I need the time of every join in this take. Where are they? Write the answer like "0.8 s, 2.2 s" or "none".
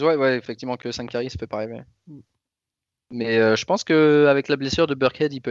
none